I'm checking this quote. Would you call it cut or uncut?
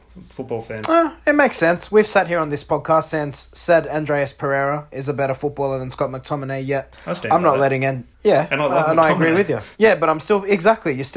cut